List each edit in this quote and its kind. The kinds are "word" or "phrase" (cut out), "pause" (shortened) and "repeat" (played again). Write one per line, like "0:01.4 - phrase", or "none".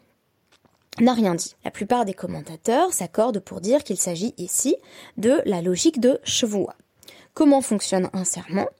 0:01.6 - pause